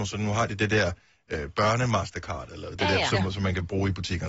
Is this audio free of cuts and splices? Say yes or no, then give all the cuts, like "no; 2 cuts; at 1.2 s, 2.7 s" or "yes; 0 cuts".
yes; 0 cuts